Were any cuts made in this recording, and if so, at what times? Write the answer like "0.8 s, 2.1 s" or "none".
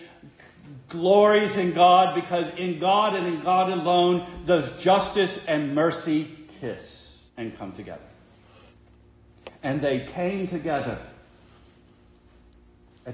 7.3 s